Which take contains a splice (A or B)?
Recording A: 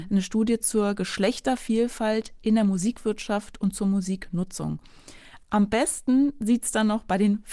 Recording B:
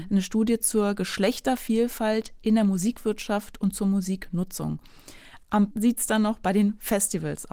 B